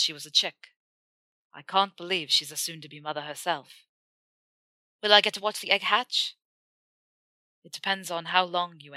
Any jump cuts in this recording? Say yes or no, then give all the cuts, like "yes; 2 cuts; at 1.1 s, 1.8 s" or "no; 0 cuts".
no; 0 cuts